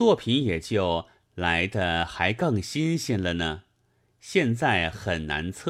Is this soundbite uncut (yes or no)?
yes